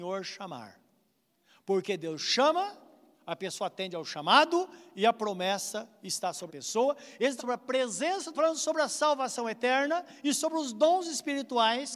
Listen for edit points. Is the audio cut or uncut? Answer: cut